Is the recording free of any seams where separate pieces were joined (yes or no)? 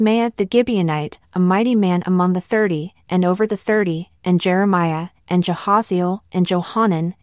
yes